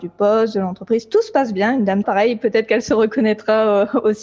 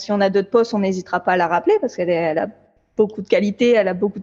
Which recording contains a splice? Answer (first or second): first